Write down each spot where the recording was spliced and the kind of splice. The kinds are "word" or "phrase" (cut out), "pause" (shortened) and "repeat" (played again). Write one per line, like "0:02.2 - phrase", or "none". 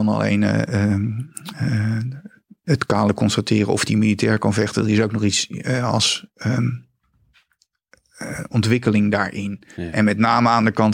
none